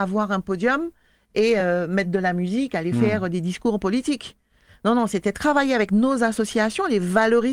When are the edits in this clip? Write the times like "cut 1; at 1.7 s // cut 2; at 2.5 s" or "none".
none